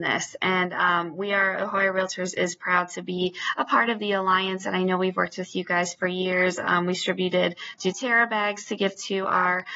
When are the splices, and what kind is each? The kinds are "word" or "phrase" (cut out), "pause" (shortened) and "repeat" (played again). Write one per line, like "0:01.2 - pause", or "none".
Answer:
none

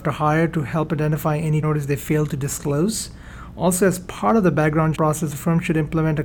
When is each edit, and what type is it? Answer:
0:01.6 - word
0:04.9 - word

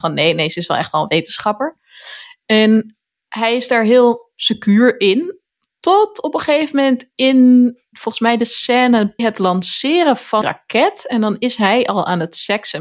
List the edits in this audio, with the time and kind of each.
0:07.9 - word
0:09.2 - word
0:10.4 - word

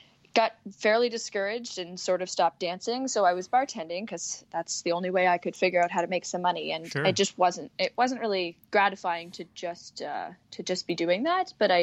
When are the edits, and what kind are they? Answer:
0:08.7 - pause
0:10.4 - pause

